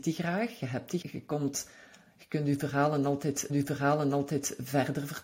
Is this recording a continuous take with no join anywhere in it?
no; 2 cuts; at 1.0 s, 3.5 s

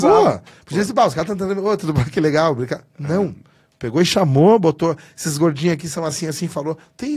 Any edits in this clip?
no; 0 cuts

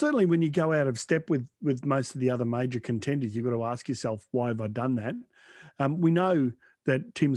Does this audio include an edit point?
no; 0 cuts

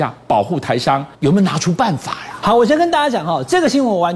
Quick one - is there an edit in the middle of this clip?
yes; 1 cut; at 1.1 s

